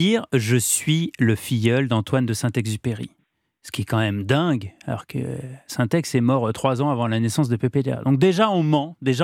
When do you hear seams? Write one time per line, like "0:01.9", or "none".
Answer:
none